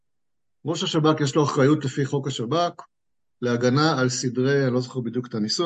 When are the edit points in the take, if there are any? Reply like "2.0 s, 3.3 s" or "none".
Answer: none